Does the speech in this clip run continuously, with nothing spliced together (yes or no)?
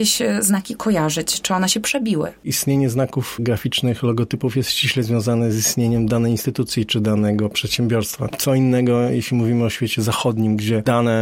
yes